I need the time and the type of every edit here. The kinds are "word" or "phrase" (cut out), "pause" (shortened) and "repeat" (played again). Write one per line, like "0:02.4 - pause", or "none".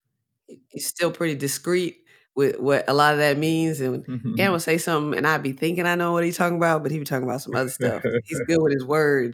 none

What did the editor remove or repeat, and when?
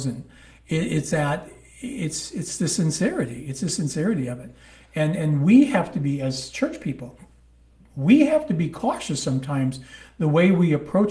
none

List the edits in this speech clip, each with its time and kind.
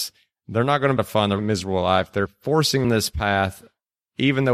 0:01.0 - phrase
0:01.4 - word
0:02.8 - phrase

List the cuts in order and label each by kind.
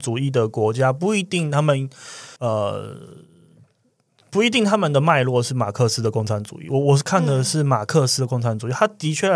0:02.4 - pause

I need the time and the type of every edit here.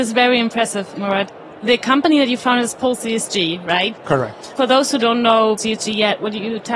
0:05.6 - word

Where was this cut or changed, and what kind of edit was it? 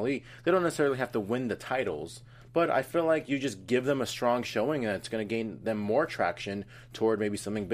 none

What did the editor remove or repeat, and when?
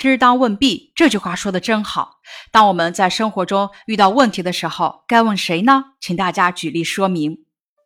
none

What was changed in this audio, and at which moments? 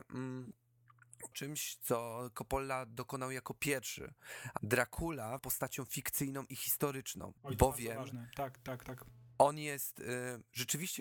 0:01.3 - word
0:04.6 - phrase
0:05.4 - phrase
0:07.4 - pause

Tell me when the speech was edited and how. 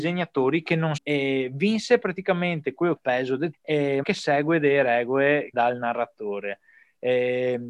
0:01.0 - phrase
0:03.0 - phrase
0:03.5 - word
0:04.0 - word
0:05.5 - word

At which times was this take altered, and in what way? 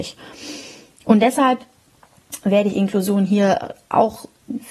none

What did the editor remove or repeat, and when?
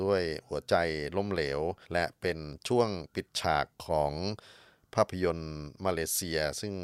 0:01.8 - pause

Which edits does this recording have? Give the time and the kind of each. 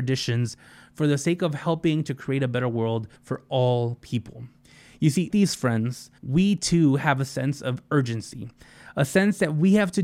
0:03.2 - pause
0:05.3 - word
0:06.2 - pause

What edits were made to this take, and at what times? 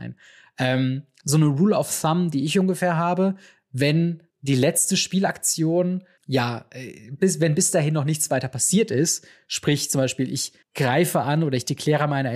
0:04.3 - pause
0:06.2 - word
0:10.6 - pause

